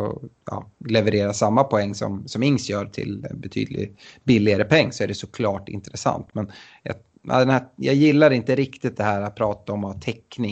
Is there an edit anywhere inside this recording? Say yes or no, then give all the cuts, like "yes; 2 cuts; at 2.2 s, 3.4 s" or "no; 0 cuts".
no; 0 cuts